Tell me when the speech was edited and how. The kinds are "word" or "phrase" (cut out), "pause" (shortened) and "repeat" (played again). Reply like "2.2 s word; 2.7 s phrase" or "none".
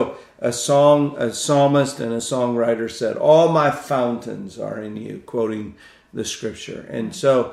none